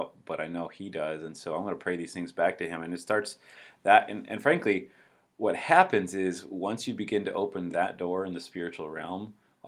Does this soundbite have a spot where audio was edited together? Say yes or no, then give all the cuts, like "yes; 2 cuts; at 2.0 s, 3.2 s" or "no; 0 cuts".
no; 0 cuts